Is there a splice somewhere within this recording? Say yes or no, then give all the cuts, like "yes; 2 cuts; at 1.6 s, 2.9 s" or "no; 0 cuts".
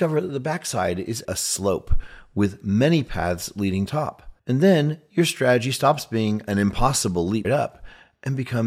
yes; 4 cuts; at 1.2 s, 3.9 s, 4.4 s, 7.4 s